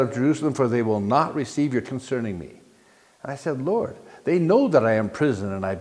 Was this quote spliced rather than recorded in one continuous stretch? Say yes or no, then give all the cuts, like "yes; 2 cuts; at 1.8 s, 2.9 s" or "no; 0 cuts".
yes; 1 cut; at 1.8 s